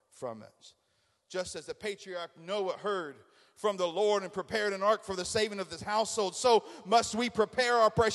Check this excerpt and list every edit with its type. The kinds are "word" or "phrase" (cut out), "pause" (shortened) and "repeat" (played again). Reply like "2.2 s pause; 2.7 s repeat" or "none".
none